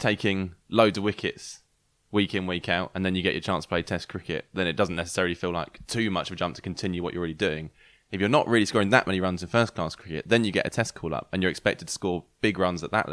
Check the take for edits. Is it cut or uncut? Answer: uncut